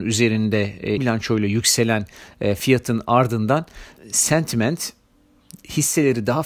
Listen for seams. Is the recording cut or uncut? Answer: cut